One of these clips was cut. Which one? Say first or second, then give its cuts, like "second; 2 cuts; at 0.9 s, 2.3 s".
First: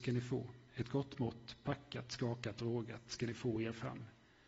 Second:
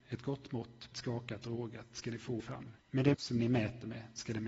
second; 4 cuts; at 0.9 s, 2.4 s, 2.8 s, 3.1 s